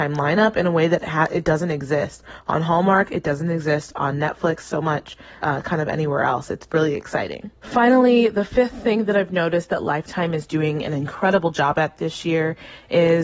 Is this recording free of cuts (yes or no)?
no